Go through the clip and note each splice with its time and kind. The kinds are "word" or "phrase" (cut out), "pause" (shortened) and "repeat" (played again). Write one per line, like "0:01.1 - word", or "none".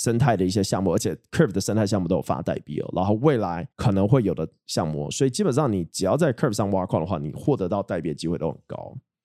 0:03.7 - pause